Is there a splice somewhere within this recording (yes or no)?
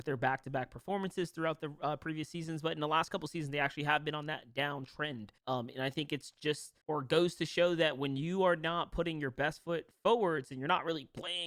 yes